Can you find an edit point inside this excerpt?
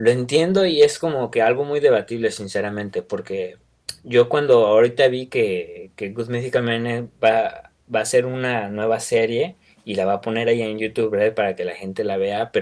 no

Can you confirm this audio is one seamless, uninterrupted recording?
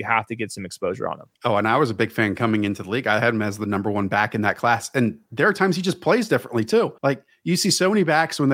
no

